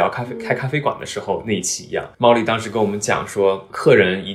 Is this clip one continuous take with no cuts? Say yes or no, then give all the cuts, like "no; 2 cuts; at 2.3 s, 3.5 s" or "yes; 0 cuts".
no; 1 cut; at 2.1 s